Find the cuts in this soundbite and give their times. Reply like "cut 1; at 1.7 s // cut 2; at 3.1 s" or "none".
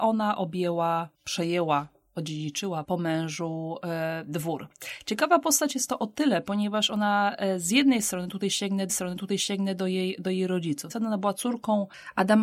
cut 1; at 1.1 s // cut 2; at 2.8 s // cut 3; at 8.9 s // cut 4; at 10.9 s